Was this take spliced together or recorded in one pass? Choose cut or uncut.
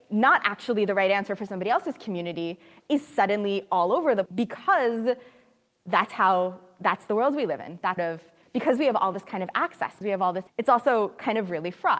cut